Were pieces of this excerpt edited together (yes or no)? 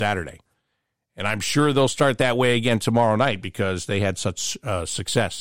no